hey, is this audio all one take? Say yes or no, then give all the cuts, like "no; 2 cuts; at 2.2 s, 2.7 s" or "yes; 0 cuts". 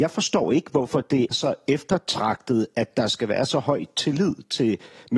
no; 1 cut; at 1.3 s